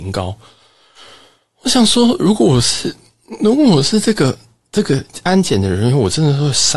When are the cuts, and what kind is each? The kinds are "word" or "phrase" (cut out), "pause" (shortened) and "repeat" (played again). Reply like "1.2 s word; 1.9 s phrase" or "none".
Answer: none